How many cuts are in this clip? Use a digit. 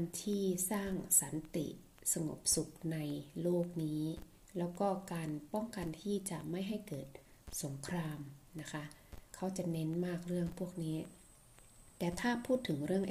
1